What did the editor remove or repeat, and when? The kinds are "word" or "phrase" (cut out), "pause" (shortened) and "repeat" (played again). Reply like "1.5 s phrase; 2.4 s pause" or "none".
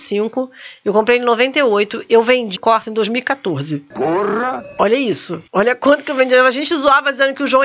2.6 s word; 5.5 s pause